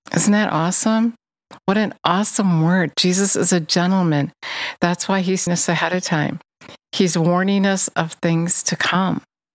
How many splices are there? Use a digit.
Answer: 1